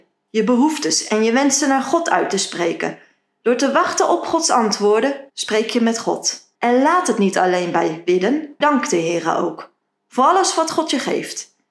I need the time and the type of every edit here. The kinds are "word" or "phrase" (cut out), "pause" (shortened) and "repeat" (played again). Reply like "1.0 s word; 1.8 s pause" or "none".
5.3 s pause; 6.5 s pause; 8.6 s word